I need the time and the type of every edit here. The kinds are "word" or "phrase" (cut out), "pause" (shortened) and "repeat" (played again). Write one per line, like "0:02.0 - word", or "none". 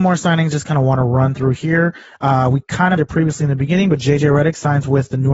0:03.0 - word

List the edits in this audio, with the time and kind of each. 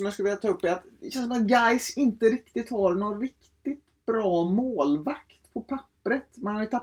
none

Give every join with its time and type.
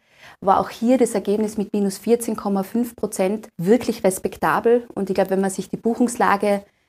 0:03.5 - pause

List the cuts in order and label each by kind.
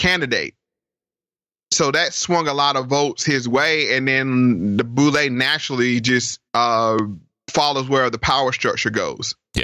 0:06.5 - pause

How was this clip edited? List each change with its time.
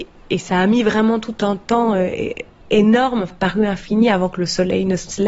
0:03.3 - phrase

